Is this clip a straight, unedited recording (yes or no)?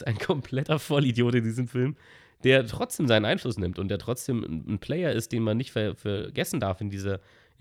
yes